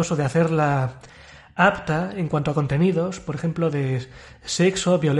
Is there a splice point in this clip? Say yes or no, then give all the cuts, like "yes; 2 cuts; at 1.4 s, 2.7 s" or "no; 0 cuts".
no; 0 cuts